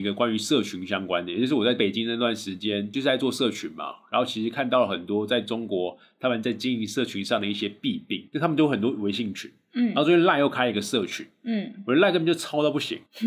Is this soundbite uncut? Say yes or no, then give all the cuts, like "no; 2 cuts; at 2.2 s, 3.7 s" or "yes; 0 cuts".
yes; 0 cuts